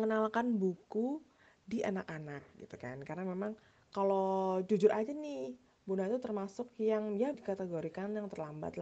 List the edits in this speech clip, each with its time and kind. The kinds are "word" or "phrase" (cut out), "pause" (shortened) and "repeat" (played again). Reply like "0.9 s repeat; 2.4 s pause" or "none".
7.3 s word